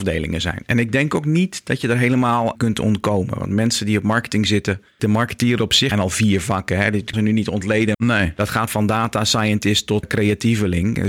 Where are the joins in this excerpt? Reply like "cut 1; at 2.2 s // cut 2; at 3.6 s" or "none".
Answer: cut 1; at 2.5 s // cut 2; at 5.0 s // cut 3; at 5.9 s // cut 4; at 7.1 s // cut 5; at 7.9 s // cut 6; at 8.7 s // cut 7; at 10.0 s